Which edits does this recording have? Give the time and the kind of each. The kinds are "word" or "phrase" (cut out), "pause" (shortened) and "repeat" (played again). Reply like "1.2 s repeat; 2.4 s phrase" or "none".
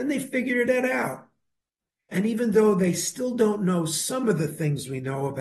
none